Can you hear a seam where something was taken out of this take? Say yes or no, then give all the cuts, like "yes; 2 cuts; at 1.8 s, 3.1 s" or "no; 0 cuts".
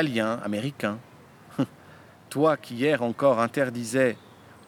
no; 0 cuts